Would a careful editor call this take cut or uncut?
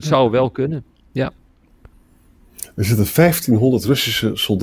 uncut